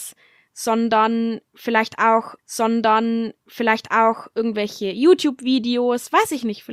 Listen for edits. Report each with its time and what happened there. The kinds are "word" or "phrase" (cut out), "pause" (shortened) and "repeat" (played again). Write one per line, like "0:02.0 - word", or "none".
0:02.4 - repeat